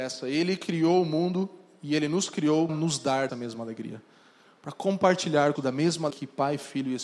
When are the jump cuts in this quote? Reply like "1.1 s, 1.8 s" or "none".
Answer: 2.7 s, 3.3 s, 5.5 s, 6.1 s